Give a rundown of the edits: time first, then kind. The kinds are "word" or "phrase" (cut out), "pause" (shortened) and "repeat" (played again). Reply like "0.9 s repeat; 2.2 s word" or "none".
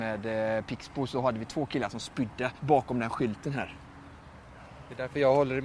2.6 s pause